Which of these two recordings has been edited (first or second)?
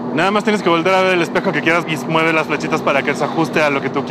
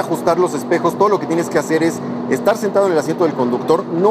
first